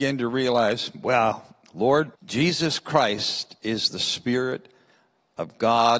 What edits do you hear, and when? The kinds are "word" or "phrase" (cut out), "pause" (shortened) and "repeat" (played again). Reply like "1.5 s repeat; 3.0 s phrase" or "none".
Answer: 2.1 s pause